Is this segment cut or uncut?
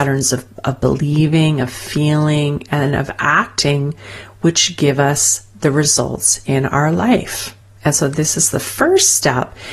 uncut